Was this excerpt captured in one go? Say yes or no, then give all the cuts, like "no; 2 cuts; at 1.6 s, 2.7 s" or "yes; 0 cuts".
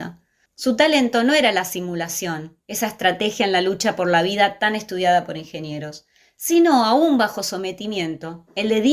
yes; 0 cuts